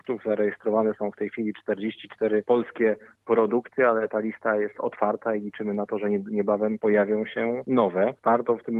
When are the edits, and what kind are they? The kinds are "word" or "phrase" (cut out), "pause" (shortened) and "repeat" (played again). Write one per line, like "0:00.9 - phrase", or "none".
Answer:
none

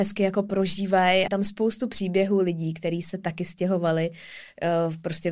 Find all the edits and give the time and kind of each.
0:01.3 - phrase

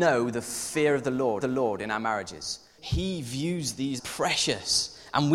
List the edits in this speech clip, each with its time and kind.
0:01.4 - repeat
0:02.8 - word
0:04.0 - phrase

